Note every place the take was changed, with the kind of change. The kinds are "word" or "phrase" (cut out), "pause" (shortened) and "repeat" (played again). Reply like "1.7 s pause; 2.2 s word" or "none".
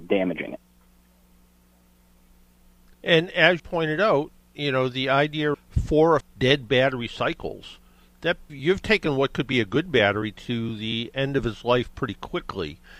3.6 s word; 5.5 s word; 6.2 s word; 8.5 s word

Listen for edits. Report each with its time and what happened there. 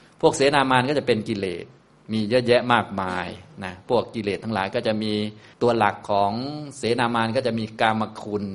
5.5 s pause

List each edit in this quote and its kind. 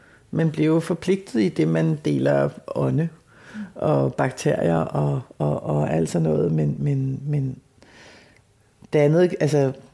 none

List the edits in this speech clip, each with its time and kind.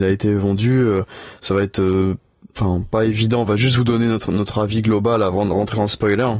none

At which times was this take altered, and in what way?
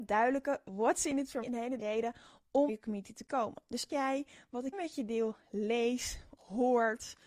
1.4 s word; 1.8 s word; 2.7 s word; 3.9 s word; 4.7 s word; 6.4 s word

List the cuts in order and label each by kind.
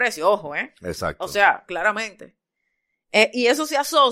none

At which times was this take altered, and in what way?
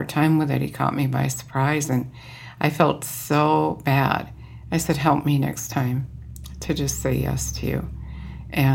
none

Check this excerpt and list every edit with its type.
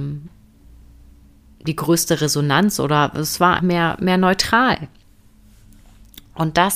3.6 s word

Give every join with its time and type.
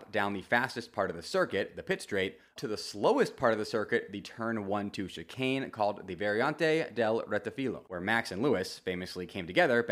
2.6 s word

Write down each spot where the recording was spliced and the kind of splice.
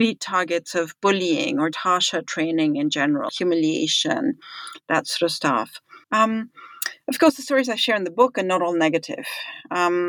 1.7 s word; 3.3 s word; 6.0 s pause

